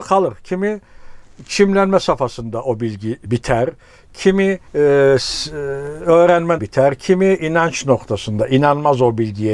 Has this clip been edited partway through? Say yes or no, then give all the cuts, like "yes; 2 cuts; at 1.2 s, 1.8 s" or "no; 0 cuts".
yes; 3 cuts; at 3.3 s, 4.7 s, 6.6 s